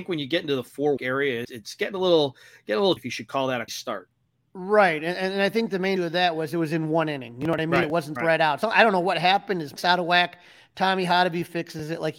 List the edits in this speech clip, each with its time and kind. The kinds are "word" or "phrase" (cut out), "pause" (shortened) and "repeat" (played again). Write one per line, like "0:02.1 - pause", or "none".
0:01.0 - word
0:01.4 - word
0:03.0 - word
0:03.7 - word
0:06.0 - word
0:08.2 - word
0:08.6 - word
0:09.8 - word